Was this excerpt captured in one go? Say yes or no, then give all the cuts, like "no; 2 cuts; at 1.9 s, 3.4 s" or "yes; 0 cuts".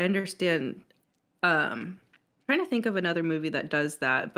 no; 1 cut; at 2.3 s